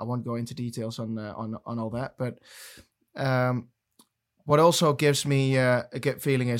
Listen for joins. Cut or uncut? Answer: uncut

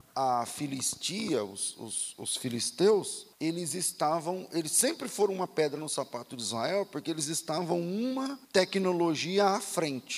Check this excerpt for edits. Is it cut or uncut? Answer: cut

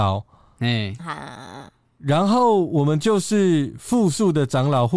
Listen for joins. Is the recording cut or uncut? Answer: uncut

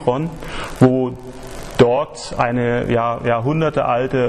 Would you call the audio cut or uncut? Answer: uncut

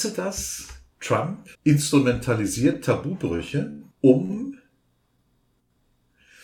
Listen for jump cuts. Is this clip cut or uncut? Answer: cut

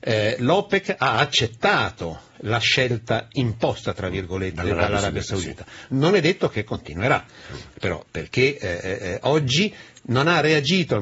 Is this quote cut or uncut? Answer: uncut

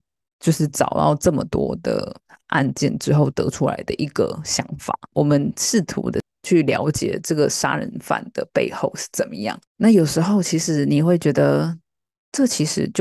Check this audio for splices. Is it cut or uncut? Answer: uncut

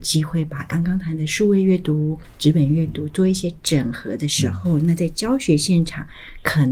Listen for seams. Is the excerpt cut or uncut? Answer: uncut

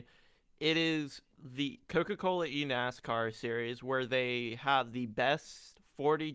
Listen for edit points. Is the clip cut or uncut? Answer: cut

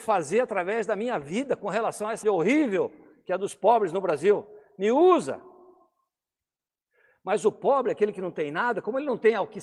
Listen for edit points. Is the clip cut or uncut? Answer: cut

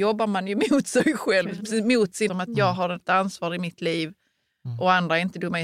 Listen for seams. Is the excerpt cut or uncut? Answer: cut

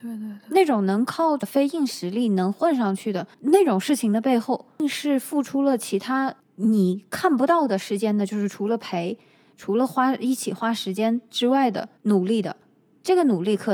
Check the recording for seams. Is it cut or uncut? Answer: cut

